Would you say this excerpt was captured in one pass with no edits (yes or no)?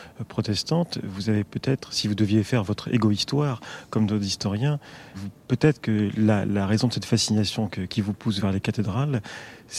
no